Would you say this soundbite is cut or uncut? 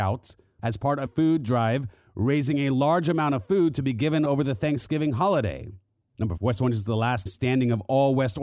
cut